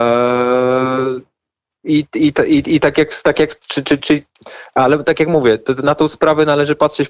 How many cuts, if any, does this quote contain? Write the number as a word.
one